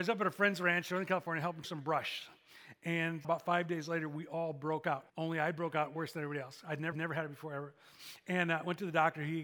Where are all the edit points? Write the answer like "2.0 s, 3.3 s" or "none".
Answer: 1.6 s, 3.2 s, 5.1 s, 6.9 s